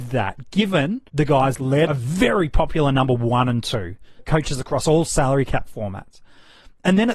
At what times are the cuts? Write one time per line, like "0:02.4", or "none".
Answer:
0:01.1
0:01.6
0:01.9
0:04.2